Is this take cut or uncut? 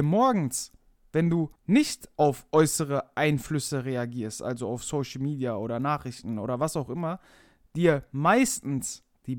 cut